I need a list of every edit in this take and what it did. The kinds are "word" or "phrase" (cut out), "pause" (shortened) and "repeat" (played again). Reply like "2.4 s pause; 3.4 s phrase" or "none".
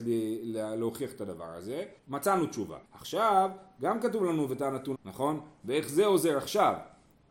2.0 s pause; 2.8 s pause; 4.9 s word